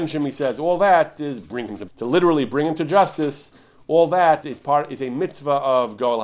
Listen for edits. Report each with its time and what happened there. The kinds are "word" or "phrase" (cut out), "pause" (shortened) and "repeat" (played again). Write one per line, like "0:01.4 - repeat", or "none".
0:01.9 - word
0:04.4 - word